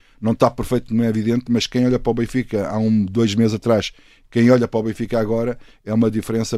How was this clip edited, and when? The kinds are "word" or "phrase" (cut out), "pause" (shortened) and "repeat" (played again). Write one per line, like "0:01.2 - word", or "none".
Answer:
none